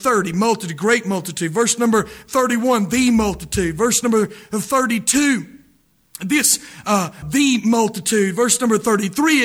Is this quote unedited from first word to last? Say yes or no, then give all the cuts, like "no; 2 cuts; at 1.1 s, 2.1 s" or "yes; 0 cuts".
no; 1 cut; at 7.2 s